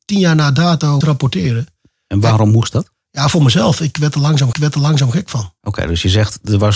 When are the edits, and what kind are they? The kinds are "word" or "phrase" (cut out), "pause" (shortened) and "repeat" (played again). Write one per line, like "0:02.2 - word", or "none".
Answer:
0:01.0 - phrase
0:04.5 - repeat
0:05.6 - pause